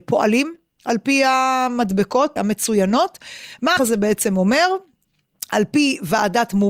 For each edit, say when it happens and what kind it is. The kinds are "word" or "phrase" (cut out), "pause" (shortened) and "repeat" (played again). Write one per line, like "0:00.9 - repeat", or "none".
0:02.4 - word
0:03.8 - word